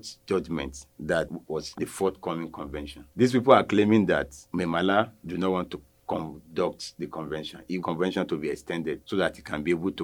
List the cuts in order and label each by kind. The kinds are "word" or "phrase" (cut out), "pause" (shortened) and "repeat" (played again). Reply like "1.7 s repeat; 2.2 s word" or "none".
1.7 s phrase; 7.8 s phrase